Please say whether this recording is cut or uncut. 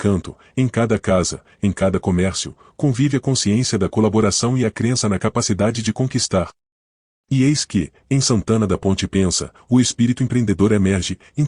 uncut